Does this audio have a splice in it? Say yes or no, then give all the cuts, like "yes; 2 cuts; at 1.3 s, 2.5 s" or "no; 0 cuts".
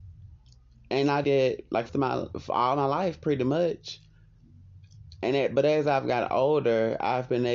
yes; 2 cuts; at 1.2 s, 1.9 s